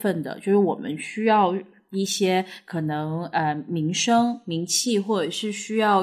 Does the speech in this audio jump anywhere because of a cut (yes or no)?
no